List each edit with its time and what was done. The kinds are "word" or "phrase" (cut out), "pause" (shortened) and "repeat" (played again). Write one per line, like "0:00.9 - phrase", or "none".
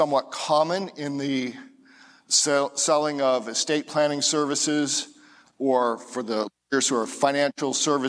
none